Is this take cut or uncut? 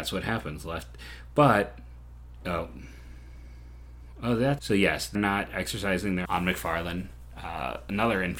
cut